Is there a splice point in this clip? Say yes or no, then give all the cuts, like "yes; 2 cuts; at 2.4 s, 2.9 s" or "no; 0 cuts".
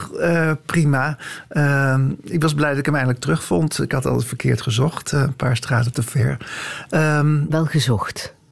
no; 0 cuts